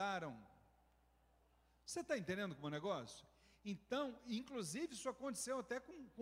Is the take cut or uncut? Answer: uncut